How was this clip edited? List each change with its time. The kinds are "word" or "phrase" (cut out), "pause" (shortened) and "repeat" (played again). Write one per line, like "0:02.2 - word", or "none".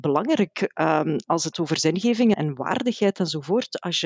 0:01.5 - word
0:02.3 - word

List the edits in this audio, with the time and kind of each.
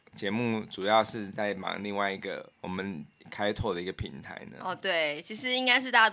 0:02.5 - pause

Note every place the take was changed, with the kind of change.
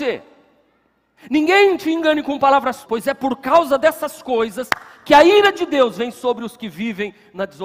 0:02.8 - word

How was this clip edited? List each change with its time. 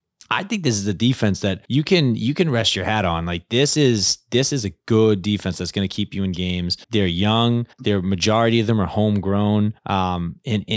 0:01.6 - pause
0:06.8 - pause
0:07.7 - pause
0:09.8 - pause

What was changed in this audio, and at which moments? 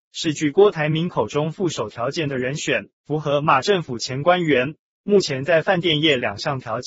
0:02.9 - pause

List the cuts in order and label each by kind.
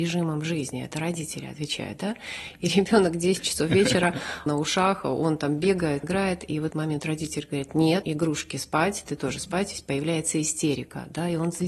0:04.5 - word
0:06.0 - word
0:06.7 - word
0:08.0 - word

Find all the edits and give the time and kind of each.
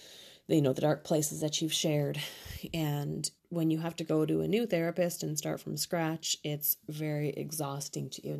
0:03.4 - pause

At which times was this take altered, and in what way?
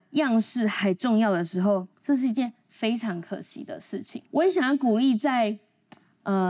0:01.9 - pause
0:04.3 - pause

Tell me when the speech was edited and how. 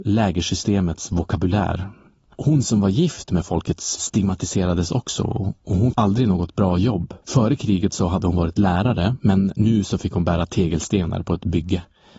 0:04.0 - word
0:05.9 - word
0:07.2 - pause

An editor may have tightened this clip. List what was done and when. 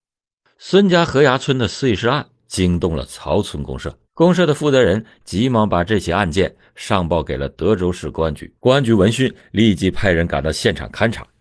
0:04.0 - pause
0:08.6 - pause

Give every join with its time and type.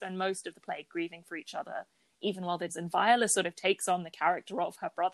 0:02.7 - phrase

